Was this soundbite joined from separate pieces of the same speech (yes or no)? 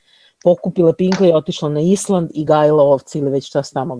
no